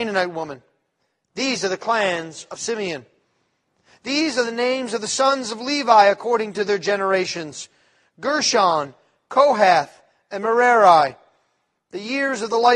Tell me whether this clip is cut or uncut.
uncut